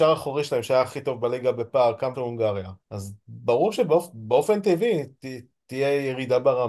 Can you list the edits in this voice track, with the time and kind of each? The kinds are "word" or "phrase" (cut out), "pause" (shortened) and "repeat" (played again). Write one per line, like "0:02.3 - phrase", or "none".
0:02.1 - word
0:02.8 - pause